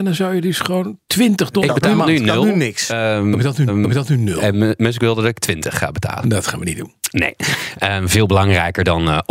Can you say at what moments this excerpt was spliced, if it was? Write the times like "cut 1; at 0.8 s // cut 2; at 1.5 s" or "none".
cut 1; at 3.7 s